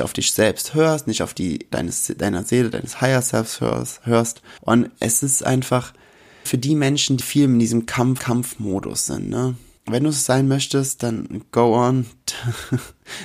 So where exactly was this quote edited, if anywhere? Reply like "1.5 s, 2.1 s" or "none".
1.7 s, 4.6 s, 6.5 s, 7.2 s, 8.2 s, 9.8 s